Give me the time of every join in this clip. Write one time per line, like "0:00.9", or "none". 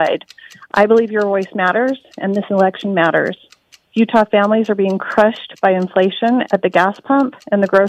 none